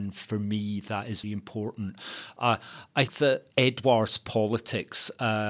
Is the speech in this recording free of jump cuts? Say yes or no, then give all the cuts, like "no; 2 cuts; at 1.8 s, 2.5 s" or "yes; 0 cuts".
no; 3 cuts; at 1.2 s, 3.1 s, 3.5 s